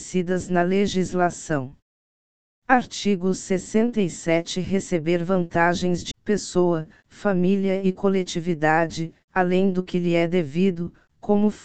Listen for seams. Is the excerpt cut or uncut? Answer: cut